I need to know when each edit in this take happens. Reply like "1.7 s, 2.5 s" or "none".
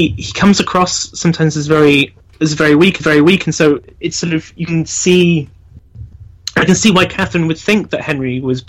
3.0 s

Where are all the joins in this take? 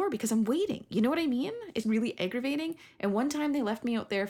1.8 s

